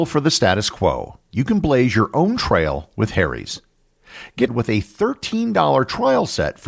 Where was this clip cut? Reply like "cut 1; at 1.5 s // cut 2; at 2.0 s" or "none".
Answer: cut 1; at 4.5 s